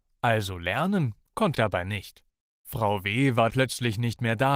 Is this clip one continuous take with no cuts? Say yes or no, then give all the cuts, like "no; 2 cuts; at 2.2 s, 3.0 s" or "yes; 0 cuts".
no; 2 cuts; at 1.5 s, 3.5 s